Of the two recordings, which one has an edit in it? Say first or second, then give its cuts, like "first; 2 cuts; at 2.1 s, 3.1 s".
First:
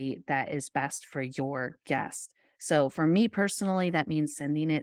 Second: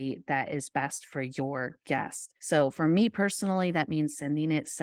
second; 1 cut; at 2.4 s